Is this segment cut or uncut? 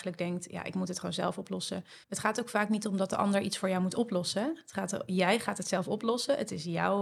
cut